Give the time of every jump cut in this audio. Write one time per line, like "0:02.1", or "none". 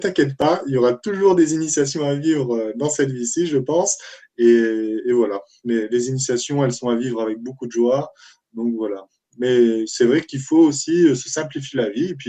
none